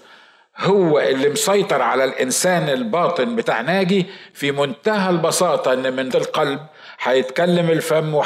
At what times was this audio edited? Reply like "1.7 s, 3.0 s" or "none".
6.1 s